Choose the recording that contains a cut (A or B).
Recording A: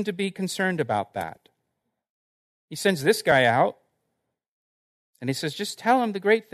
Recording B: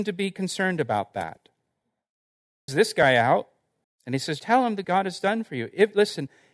B